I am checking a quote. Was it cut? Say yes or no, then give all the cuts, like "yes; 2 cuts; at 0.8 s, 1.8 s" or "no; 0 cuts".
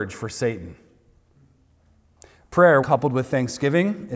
yes; 1 cut; at 2.8 s